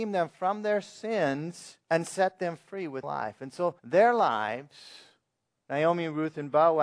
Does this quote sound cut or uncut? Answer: cut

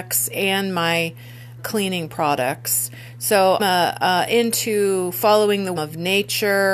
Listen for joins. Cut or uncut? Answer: cut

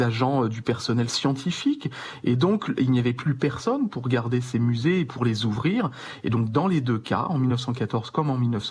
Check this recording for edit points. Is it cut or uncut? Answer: uncut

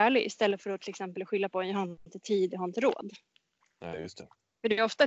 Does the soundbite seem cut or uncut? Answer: uncut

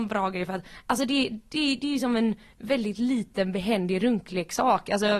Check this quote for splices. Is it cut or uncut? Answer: uncut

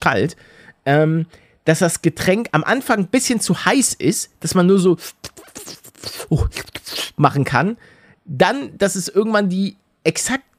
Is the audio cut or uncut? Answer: uncut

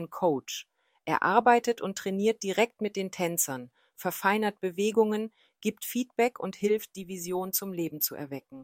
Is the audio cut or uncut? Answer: uncut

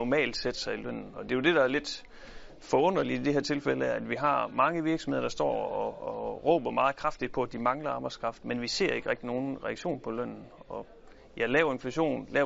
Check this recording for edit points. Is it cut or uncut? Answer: uncut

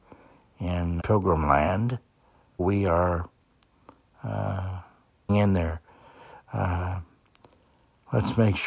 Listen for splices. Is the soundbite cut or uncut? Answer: cut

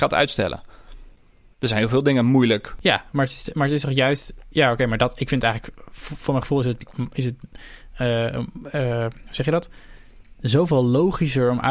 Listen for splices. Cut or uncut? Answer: uncut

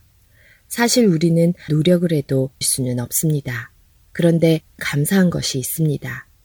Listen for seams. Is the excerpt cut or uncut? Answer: cut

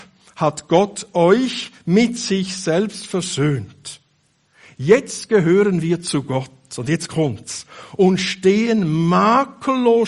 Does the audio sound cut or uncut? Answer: uncut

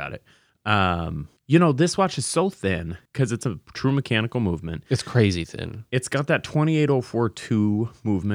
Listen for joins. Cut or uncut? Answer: cut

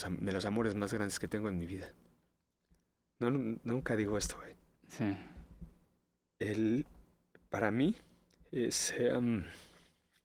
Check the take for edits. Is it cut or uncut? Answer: uncut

